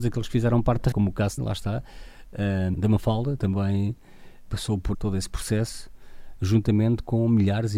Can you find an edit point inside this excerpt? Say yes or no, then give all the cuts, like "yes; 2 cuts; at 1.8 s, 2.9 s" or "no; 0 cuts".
yes; 6 cuts; at 0.9 s, 1.4 s, 2.7 s, 3.4 s, 4.5 s, 4.9 s